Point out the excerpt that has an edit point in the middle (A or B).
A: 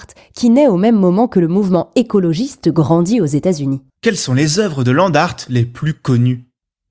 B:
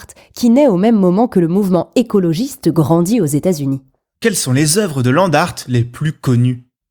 A